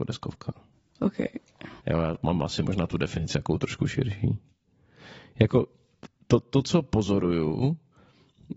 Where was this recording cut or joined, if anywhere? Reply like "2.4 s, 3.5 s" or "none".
1.8 s